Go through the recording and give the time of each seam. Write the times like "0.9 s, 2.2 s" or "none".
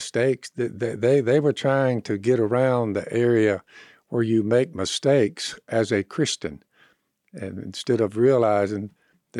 none